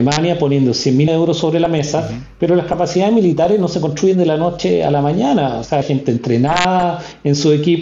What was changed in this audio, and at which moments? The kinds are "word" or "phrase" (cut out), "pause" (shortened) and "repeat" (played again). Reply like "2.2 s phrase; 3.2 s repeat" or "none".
1.1 s word; 5.8 s word